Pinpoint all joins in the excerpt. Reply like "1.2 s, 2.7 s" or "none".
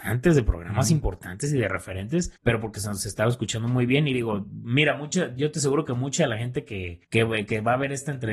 2.4 s, 7.0 s